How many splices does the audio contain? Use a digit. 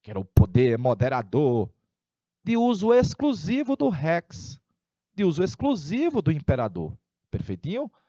0